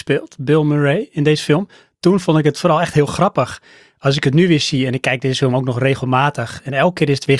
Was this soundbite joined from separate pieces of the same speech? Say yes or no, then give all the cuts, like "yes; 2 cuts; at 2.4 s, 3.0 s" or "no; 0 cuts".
no; 0 cuts